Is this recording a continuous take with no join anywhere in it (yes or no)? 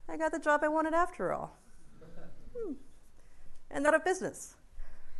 no